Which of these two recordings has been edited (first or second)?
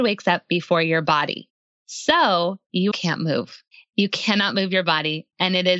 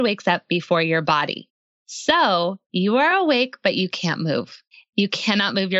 first